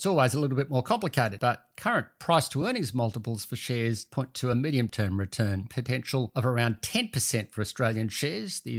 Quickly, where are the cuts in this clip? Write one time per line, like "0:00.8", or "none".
none